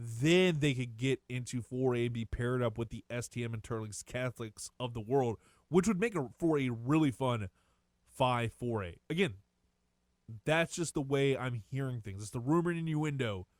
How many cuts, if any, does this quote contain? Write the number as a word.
zero